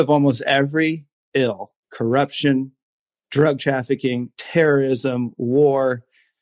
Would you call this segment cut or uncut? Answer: cut